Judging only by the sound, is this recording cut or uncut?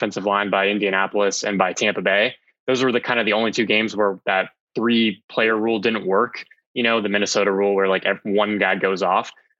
uncut